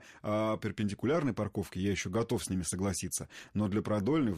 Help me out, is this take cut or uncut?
uncut